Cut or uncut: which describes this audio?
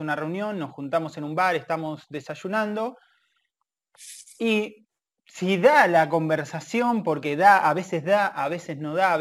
uncut